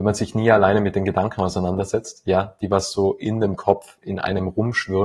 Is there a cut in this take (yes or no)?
no